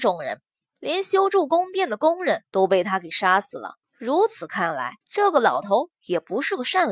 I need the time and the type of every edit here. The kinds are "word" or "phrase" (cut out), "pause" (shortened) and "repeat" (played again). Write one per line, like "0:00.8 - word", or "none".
0:02.5 - pause
0:03.8 - pause
0:05.0 - pause